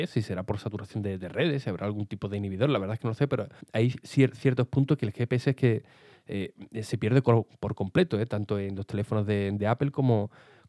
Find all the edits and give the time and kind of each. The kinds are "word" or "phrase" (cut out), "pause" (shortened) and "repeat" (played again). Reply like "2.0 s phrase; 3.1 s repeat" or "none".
3.6 s pause